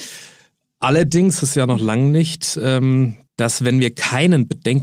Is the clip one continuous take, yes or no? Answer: no